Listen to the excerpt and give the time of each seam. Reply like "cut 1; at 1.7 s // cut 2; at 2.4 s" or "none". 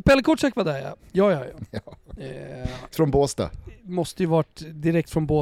cut 1; at 2.9 s